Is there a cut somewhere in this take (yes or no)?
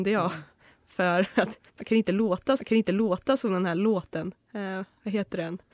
yes